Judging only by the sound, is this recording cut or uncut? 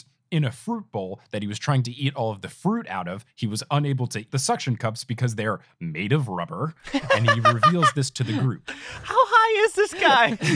cut